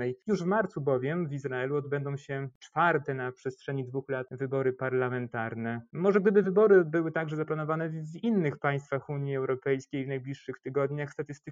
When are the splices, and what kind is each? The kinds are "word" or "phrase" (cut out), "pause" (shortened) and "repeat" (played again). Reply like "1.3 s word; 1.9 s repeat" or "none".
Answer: none